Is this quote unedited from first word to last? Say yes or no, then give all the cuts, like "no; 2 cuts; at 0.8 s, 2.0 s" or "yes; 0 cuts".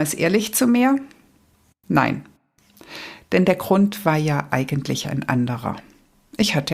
yes; 0 cuts